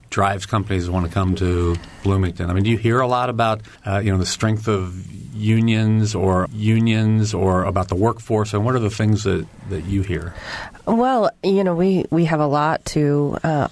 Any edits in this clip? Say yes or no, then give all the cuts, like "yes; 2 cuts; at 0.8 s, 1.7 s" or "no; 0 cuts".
yes; 2 cuts; at 3.8 s, 6.5 s